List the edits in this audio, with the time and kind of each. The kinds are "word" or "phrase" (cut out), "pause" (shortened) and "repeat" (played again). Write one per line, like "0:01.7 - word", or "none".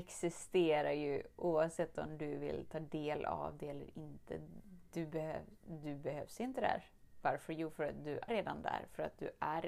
0:08.3 - word